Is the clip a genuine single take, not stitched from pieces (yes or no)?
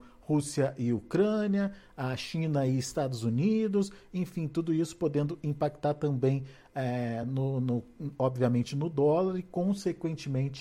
yes